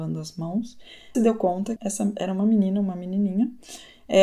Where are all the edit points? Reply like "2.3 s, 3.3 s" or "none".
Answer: 1.1 s, 1.8 s